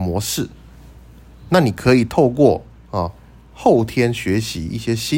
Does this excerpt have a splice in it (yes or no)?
no